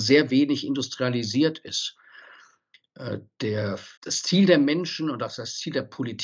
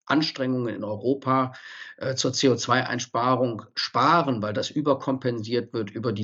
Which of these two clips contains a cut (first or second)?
first